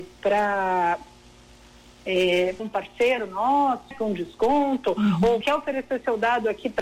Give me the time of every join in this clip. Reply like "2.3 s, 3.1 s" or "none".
2.6 s, 3.9 s, 5.4 s